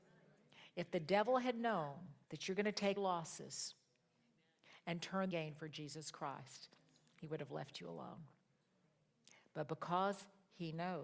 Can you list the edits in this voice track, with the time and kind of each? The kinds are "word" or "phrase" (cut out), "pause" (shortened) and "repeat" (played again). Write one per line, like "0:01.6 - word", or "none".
0:02.2 - pause
0:03.0 - word
0:05.3 - phrase